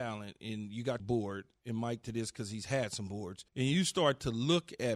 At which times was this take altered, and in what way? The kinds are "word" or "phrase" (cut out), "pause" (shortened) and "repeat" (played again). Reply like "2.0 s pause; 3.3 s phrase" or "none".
1.0 s word; 2.0 s phrase; 3.5 s pause